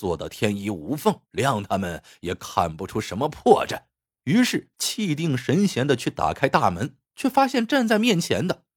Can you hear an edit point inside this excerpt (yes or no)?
yes